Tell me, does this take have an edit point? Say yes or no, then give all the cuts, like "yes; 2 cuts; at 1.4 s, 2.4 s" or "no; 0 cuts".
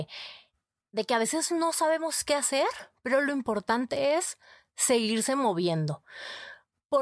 no; 0 cuts